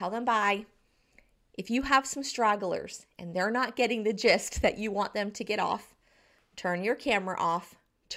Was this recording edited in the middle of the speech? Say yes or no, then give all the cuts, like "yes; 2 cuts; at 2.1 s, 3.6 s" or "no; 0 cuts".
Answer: no; 0 cuts